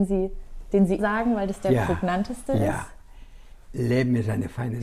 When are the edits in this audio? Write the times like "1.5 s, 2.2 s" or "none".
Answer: 1.0 s